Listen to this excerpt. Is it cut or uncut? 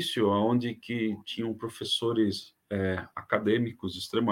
uncut